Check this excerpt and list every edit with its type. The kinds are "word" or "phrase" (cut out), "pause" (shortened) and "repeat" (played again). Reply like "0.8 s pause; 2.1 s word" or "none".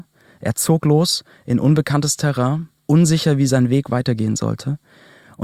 2.8 s pause